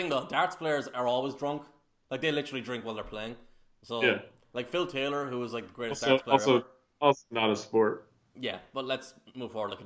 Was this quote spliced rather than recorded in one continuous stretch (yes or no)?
no